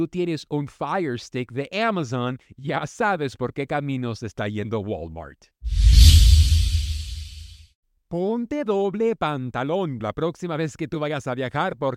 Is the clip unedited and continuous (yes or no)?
yes